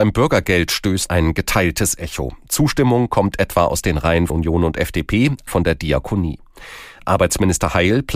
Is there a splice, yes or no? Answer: yes